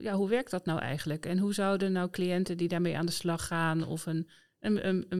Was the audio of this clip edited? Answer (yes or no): no